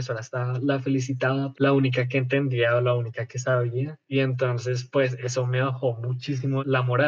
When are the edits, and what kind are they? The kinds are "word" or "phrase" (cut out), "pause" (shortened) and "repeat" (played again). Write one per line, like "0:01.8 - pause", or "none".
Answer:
0:01.5 - phrase